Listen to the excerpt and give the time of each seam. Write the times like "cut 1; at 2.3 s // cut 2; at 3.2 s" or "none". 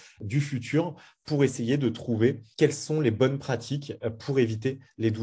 none